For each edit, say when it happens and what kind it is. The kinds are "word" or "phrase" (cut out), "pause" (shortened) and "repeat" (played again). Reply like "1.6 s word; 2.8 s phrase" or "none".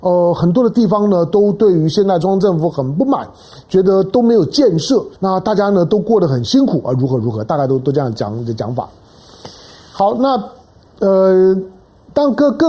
5.2 s pause